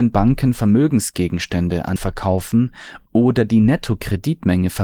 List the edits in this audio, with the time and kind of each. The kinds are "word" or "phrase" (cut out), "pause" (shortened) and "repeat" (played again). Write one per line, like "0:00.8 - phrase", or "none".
0:02.0 - word